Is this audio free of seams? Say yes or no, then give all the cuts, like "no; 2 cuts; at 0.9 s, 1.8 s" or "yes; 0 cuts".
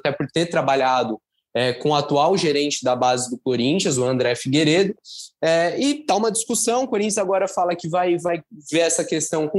yes; 0 cuts